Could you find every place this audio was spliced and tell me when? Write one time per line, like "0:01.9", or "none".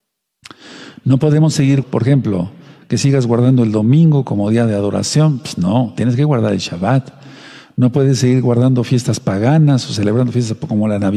0:01.8